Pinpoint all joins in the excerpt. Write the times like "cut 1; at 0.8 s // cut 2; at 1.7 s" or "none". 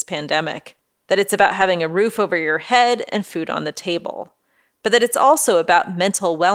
none